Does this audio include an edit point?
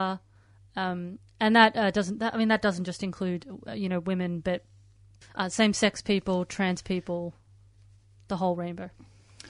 no; 0 cuts

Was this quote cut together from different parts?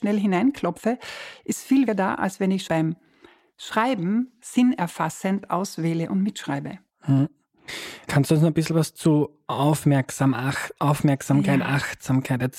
yes; 3 cuts; at 1.9 s, 2.7 s, 6.9 s

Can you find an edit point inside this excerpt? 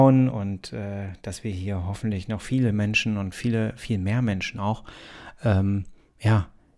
no; 0 cuts

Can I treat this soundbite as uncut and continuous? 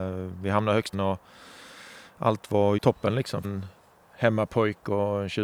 no; 3 cuts; at 0.9 s, 2.8 s, 3.4 s

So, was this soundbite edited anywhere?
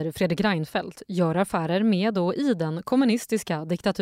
no; 0 cuts

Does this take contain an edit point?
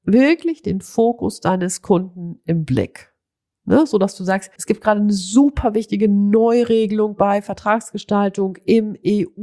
yes; 1 cut; at 4.6 s

